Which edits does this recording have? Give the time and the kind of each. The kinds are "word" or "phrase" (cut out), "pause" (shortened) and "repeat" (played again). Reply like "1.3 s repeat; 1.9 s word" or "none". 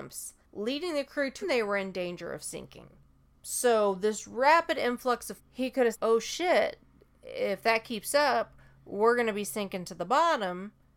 1.4 s word; 5.4 s word; 5.9 s word